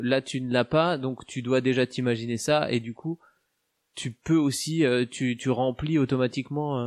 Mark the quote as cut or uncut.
uncut